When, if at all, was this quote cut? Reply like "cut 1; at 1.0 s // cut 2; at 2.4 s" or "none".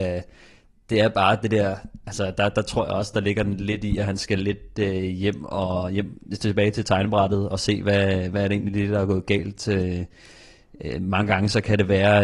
cut 1; at 7.5 s